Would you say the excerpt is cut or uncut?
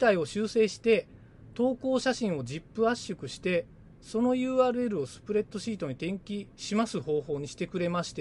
uncut